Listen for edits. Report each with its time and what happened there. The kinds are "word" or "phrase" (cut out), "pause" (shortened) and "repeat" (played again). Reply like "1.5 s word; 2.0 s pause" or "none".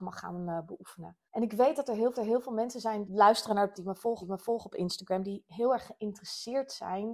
1.3 s pause; 2.1 s repeat; 3.1 s word; 3.7 s word; 4.2 s repeat